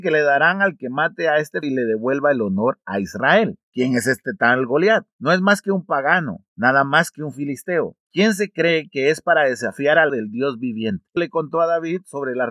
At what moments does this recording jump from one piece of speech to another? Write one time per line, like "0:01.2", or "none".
0:01.6
0:10.1
0:11.2